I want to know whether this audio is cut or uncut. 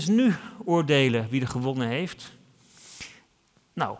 uncut